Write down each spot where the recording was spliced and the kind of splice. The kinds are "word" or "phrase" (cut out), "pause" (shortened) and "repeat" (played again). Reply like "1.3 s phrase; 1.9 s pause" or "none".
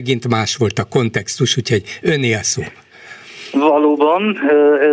none